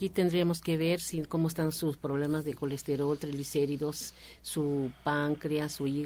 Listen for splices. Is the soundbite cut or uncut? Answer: uncut